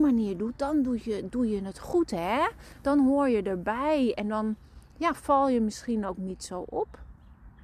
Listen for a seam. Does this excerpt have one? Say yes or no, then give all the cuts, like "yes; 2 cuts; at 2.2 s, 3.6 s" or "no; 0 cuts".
no; 0 cuts